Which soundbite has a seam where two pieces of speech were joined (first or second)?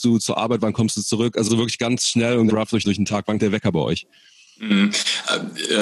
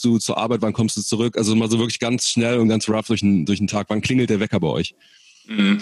first